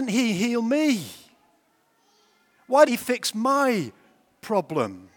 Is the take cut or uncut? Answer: cut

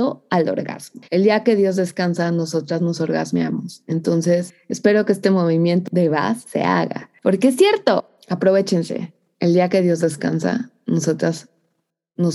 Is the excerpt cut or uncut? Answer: cut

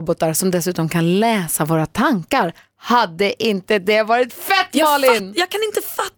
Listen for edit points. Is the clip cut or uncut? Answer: uncut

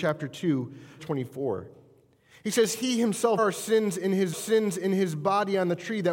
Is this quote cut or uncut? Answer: cut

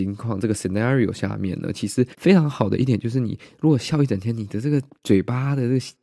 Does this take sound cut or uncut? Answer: cut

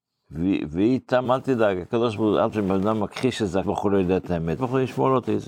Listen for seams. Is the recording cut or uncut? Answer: cut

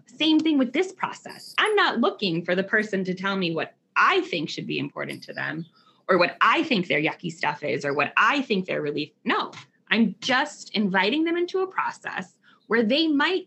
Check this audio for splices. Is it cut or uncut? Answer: uncut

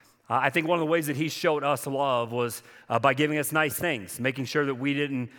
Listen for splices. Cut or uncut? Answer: uncut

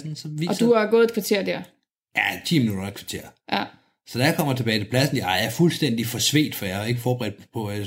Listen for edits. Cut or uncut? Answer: uncut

